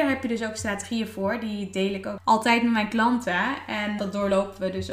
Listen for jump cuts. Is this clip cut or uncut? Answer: cut